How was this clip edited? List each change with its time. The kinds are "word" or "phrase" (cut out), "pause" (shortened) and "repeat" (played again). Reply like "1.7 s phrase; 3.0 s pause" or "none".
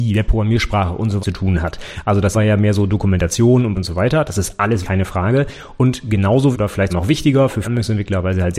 1.2 s word; 2.3 s word; 3.7 s word; 4.8 s word; 6.5 s word; 6.9 s word; 7.6 s word